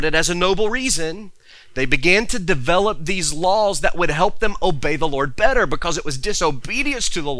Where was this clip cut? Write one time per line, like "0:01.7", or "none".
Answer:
none